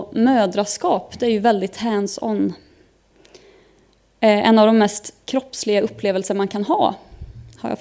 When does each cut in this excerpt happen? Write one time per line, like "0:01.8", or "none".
none